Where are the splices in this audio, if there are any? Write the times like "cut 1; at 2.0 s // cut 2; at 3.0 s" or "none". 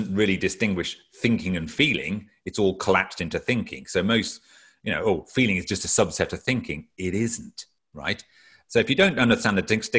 none